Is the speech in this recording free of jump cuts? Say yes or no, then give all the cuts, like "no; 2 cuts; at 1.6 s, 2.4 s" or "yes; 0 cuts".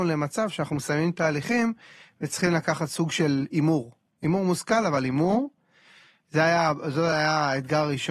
yes; 0 cuts